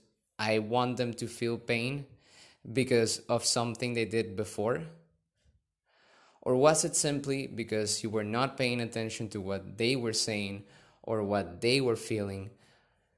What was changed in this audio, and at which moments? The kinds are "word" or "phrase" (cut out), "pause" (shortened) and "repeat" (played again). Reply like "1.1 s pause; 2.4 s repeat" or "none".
none